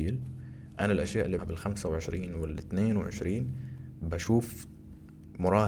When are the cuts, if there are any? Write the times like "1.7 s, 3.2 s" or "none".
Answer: 1.4 s